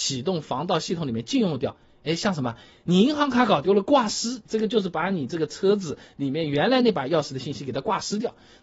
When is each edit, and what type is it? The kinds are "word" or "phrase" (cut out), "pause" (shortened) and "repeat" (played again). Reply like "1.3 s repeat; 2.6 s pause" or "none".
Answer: 4.5 s word